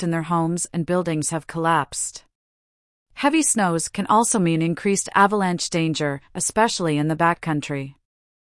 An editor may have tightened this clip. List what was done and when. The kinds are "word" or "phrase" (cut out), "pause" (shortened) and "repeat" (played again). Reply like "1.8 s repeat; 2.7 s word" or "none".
none